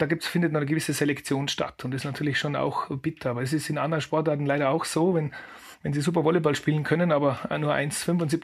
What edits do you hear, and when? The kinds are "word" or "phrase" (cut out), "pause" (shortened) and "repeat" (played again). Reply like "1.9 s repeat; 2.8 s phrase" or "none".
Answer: none